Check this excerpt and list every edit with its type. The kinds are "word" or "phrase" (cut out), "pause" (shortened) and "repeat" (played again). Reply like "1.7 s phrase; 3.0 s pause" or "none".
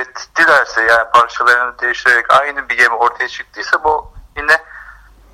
none